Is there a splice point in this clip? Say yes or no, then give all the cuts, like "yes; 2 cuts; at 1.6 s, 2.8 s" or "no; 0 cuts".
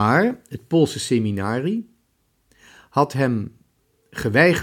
no; 0 cuts